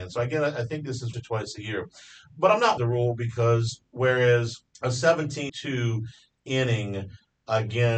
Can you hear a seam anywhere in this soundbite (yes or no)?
yes